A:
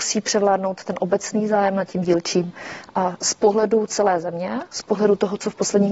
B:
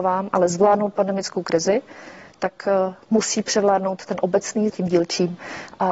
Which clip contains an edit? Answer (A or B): B